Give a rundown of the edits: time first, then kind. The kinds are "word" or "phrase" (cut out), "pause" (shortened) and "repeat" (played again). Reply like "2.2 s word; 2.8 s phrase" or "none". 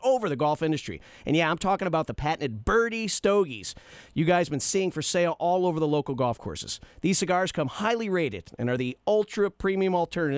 none